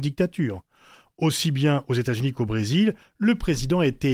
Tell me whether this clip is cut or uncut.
uncut